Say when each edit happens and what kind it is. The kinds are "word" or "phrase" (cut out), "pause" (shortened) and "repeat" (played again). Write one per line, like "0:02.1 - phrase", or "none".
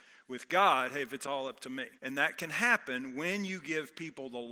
0:02.0 - pause